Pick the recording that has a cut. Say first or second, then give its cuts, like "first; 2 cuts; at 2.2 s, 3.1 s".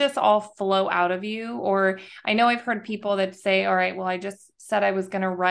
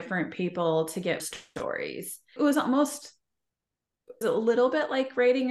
second; 3 cuts; at 1.2 s, 2.4 s, 4.2 s